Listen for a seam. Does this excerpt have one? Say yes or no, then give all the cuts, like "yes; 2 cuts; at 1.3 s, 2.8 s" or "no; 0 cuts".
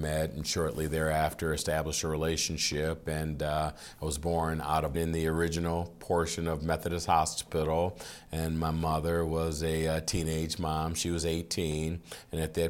yes; 1 cut; at 4.9 s